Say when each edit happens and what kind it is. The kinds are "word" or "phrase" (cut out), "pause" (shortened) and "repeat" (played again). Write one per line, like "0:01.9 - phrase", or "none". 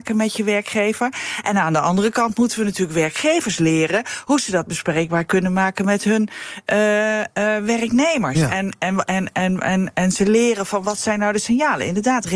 none